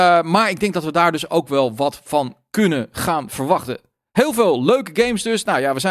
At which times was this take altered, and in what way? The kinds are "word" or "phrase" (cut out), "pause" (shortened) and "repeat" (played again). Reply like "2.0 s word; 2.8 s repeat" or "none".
none